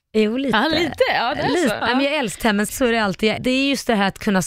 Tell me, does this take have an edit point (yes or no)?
yes